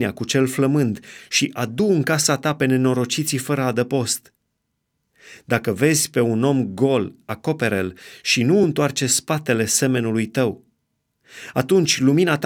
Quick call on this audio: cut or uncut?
uncut